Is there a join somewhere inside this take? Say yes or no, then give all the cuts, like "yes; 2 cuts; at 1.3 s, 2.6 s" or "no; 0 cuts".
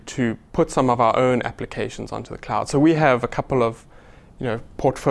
no; 0 cuts